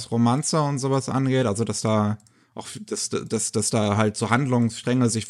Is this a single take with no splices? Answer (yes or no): yes